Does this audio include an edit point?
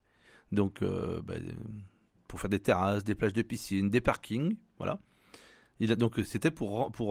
no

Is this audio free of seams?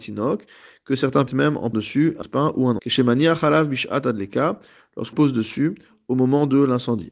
no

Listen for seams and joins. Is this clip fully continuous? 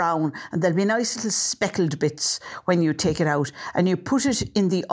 yes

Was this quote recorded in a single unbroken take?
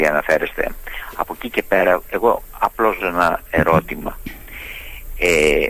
no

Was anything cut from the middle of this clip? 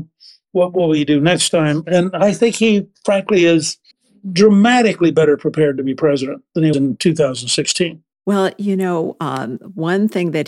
yes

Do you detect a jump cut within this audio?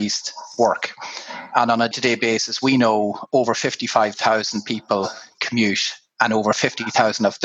yes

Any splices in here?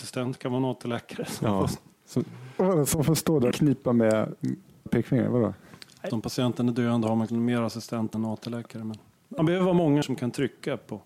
yes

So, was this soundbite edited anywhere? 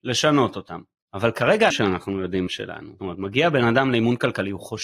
yes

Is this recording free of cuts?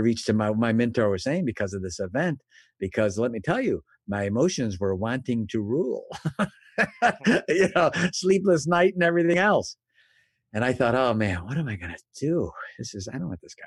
yes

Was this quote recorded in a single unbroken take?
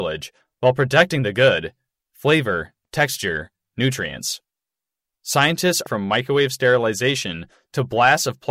no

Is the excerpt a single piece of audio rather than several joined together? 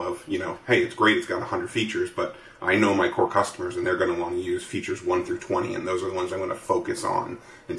yes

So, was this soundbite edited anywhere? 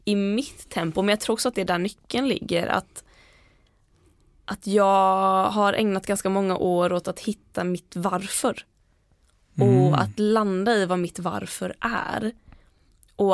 no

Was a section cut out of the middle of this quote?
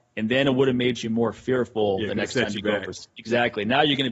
no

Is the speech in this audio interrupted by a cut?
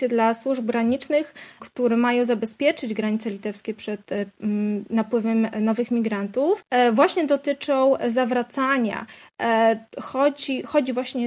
no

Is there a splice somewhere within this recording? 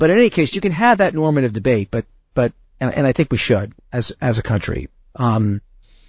no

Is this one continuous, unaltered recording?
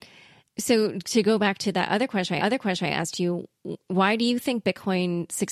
no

